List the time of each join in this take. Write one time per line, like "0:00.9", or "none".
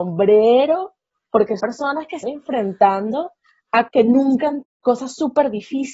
0:01.6
0:02.2
0:03.9
0:04.6